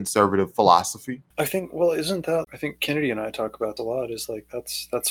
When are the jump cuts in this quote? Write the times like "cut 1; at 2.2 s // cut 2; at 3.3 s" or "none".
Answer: cut 1; at 1.3 s // cut 2; at 2.4 s // cut 3; at 3.8 s